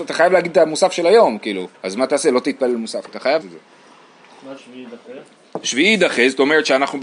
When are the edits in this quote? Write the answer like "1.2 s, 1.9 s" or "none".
1.8 s, 3.1 s, 3.4 s, 4.6 s